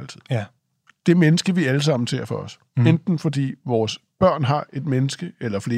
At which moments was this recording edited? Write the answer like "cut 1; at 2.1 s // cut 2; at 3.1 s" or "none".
none

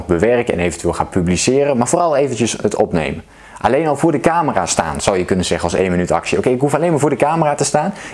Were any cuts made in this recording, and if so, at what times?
none

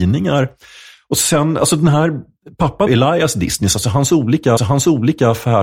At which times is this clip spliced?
cut 1; at 2.9 s // cut 2; at 4.6 s

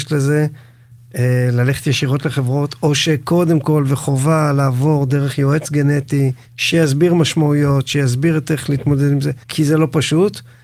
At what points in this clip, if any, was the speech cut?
cut 1; at 6.4 s // cut 2; at 9.4 s

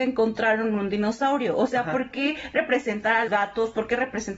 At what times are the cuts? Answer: cut 1; at 3.3 s

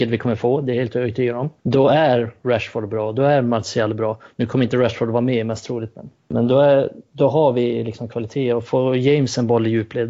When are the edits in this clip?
cut 1; at 1.6 s // cut 2; at 6.1 s

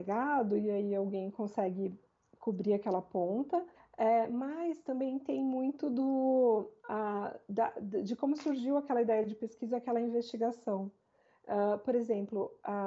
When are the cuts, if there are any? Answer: cut 1; at 3.7 s // cut 2; at 6.8 s

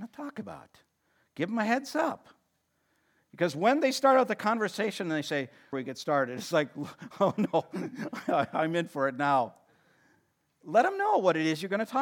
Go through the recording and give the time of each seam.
cut 1; at 5.7 s

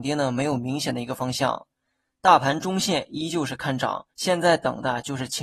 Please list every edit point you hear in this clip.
cut 1; at 4.1 s

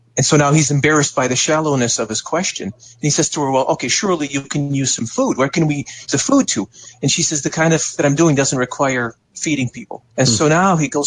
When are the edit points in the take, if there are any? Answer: cut 1; at 6.1 s // cut 2; at 8.0 s // cut 3; at 10.1 s

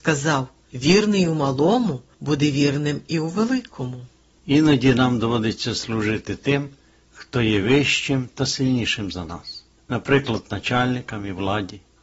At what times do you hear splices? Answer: none

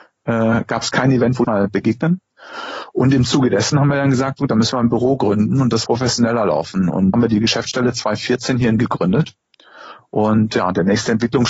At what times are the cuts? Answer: cut 1; at 1.4 s // cut 2; at 5.8 s // cut 3; at 7.1 s // cut 4; at 8.8 s

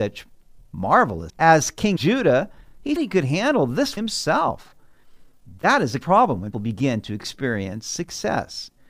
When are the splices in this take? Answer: cut 1; at 1.3 s // cut 2; at 2.0 s // cut 3; at 3.0 s // cut 4; at 4.0 s // cut 5; at 6.0 s // cut 6; at 6.5 s

